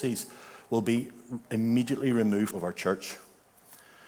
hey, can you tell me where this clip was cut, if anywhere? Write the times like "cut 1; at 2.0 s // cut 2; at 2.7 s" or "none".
cut 1; at 2.5 s